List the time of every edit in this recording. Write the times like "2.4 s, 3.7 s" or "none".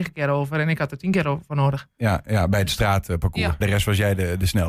3.6 s